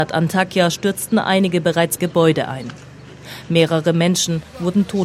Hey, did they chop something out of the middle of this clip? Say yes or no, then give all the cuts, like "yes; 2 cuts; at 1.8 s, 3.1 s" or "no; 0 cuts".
yes; 1 cut; at 2.0 s